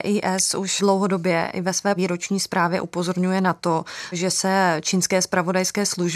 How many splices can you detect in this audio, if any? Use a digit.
1